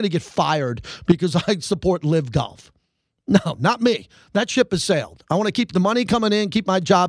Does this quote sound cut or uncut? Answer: uncut